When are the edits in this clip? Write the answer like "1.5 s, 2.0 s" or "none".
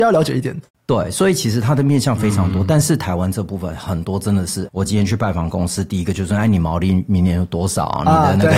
4.7 s